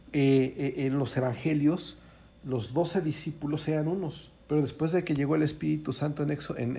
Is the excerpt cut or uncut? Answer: cut